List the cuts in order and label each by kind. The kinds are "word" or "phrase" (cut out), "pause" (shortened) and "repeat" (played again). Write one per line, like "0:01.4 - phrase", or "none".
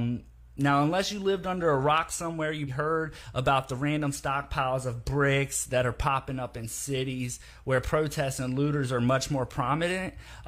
0:02.7 - word